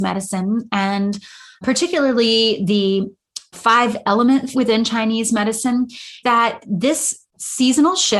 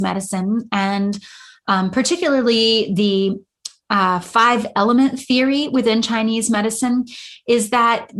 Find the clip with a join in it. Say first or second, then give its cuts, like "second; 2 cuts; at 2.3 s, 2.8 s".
first; 4 cuts; at 1.6 s, 3.5 s, 4.5 s, 6.2 s